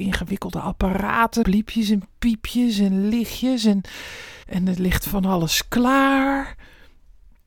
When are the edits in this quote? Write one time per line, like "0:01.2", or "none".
0:01.4
0:04.4